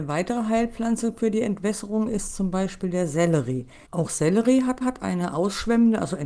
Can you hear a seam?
yes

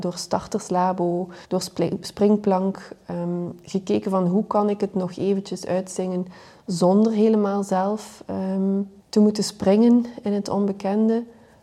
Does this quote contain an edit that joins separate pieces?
yes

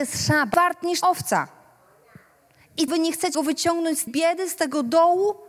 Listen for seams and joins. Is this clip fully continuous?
no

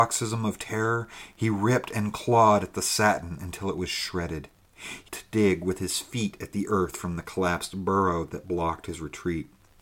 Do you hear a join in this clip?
yes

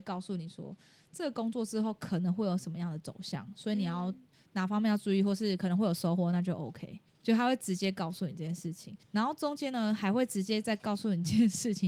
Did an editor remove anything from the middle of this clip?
yes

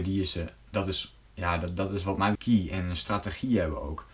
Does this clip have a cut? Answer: yes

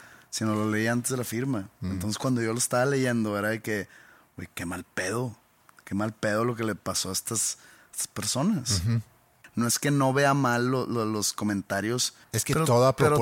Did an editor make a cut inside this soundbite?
no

